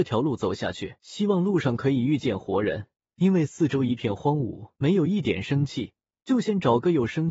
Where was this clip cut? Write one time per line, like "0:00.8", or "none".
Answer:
0:01.0
0:03.0
0:04.8
0:06.1